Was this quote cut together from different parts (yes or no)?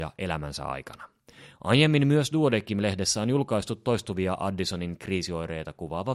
no